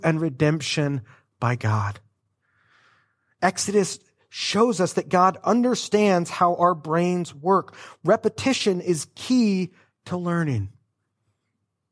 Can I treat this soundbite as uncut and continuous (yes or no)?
yes